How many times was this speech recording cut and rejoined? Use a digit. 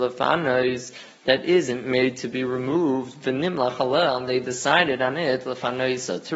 0